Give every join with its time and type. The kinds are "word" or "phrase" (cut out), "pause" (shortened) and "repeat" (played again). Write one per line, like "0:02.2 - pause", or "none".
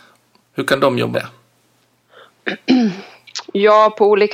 0:01.1 - word